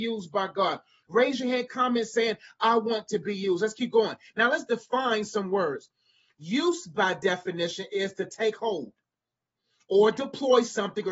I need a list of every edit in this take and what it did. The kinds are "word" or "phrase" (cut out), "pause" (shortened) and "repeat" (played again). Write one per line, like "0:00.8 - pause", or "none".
none